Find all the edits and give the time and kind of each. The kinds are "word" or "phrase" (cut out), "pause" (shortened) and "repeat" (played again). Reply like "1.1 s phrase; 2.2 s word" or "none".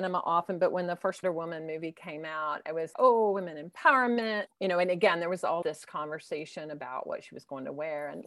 1.2 s word; 2.9 s word; 4.5 s word; 5.6 s word